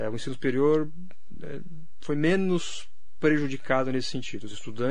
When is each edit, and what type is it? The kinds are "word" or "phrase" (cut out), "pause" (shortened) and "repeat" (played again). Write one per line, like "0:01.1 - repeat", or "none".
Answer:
none